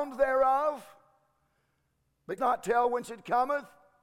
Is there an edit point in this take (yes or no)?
yes